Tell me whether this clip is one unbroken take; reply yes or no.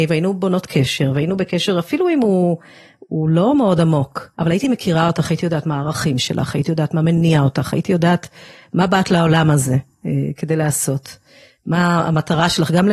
no